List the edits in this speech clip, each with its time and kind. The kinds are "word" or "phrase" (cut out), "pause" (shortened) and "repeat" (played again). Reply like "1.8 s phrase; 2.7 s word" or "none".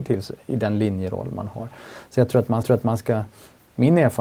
2.6 s repeat